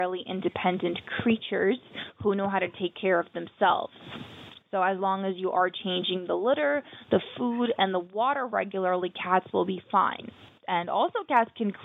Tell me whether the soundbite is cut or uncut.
uncut